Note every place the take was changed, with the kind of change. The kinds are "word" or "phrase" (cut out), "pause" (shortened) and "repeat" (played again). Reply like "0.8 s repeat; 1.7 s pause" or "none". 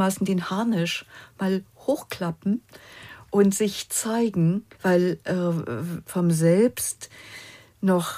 4.7 s pause; 6.0 s phrase